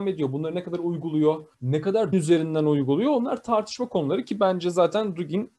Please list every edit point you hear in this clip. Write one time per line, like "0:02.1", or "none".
0:01.5
0:02.1